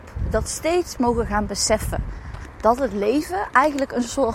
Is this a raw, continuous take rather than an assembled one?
no; 1 cut; at 1.0 s

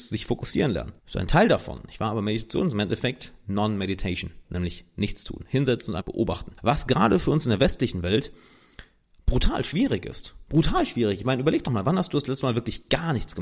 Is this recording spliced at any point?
yes; 3 cuts; at 1.0 s, 6.0 s, 6.6 s

